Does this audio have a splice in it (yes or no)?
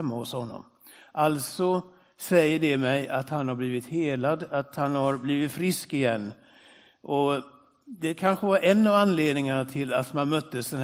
no